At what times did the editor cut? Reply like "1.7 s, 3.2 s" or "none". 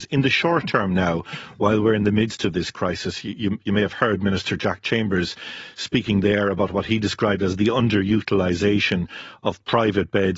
none